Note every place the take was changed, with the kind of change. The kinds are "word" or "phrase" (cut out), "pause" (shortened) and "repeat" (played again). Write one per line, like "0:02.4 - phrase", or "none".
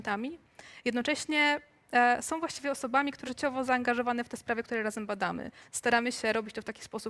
0:03.3 - word